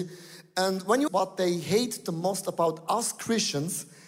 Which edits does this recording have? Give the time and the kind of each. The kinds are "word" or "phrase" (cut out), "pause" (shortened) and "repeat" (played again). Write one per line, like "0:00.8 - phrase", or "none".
0:01.1 - phrase